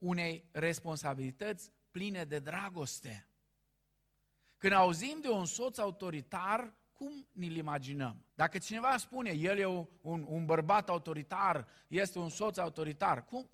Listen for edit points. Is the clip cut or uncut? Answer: cut